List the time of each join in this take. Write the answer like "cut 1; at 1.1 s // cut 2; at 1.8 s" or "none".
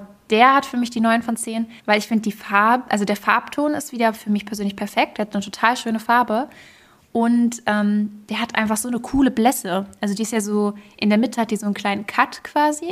cut 1; at 1.8 s